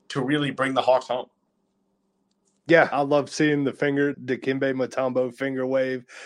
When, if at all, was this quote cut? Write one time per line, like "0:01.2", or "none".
0:02.9
0:04.1

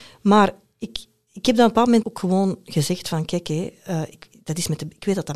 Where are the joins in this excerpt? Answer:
0:02.0

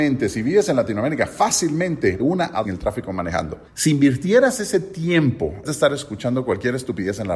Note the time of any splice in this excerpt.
0:02.2
0:02.6
0:03.7
0:05.6

